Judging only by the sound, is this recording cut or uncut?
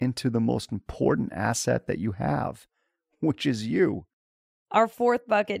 uncut